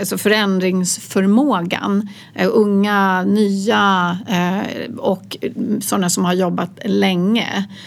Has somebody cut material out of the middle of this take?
no; 0 cuts

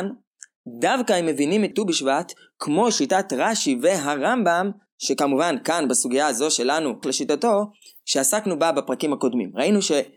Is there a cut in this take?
yes; 2 cuts; at 1.7 s, 7.0 s

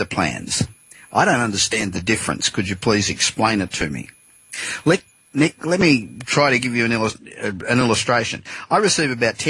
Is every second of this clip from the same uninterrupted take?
yes; 0 cuts

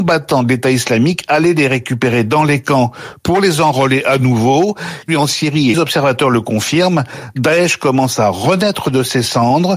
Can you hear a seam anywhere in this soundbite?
yes; 2 cuts; at 5.1 s, 5.7 s

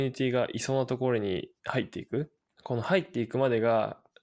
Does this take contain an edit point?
yes; 2 cuts; at 1.6 s, 2.5 s

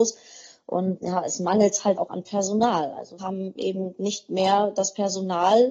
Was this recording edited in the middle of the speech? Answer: yes; 3 cuts; at 1.0 s, 2.0 s, 3.2 s

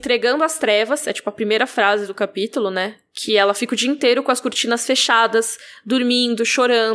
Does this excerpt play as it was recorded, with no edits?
yes; 0 cuts

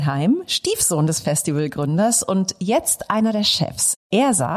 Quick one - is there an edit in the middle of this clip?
no; 0 cuts

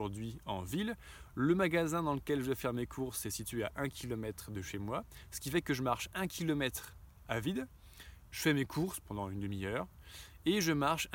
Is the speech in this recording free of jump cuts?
yes; 0 cuts

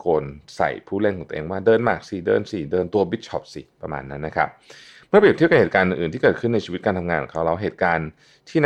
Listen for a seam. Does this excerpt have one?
no; 0 cuts

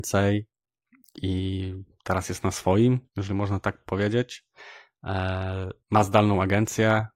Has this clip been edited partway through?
yes; 2 cuts; at 3.1 s, 5.8 s

